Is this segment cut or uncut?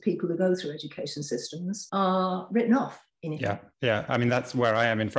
uncut